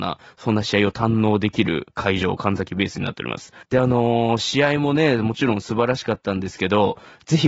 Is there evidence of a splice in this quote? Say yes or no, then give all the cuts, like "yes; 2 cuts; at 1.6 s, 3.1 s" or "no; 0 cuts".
yes; 1 cut; at 3.6 s